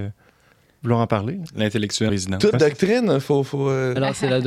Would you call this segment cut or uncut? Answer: cut